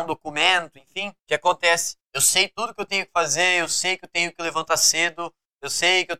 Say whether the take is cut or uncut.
cut